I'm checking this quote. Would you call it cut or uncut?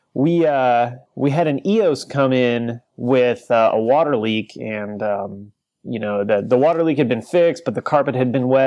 cut